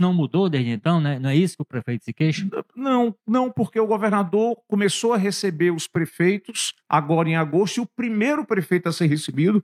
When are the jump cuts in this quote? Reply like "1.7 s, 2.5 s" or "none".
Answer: 3.2 s, 6.8 s